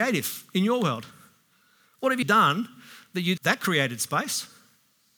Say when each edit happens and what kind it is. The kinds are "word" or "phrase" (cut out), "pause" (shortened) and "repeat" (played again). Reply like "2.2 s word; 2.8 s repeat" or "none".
2.2 s word; 3.4 s word